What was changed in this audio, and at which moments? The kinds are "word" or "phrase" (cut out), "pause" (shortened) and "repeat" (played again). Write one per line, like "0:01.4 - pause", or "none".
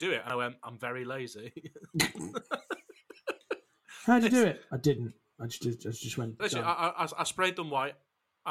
0:06.4 - phrase